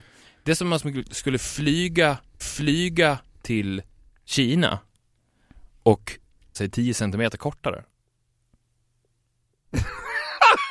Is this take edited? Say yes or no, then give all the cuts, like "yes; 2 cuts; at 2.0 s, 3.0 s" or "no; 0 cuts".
yes; 2 cuts; at 2.4 s, 6.5 s